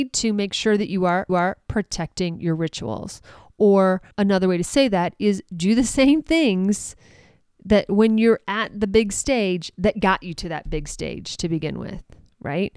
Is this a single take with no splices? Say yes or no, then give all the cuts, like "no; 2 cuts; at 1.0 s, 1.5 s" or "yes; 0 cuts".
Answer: no; 2 cuts; at 1.3 s, 4.1 s